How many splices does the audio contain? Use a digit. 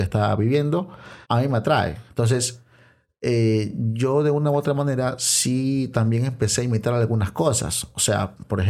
1